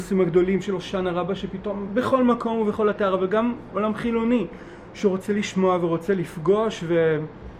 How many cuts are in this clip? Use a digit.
1